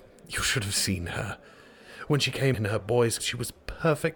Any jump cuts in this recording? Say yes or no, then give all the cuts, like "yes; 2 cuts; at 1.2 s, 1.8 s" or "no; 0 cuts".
yes; 2 cuts; at 2.5 s, 3.2 s